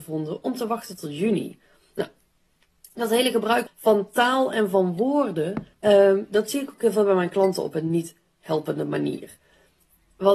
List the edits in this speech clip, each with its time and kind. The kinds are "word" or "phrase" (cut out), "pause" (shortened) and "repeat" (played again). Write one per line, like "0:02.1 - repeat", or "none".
0:03.7 - word
0:05.7 - pause